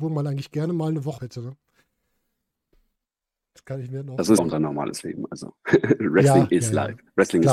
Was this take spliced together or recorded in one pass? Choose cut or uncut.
cut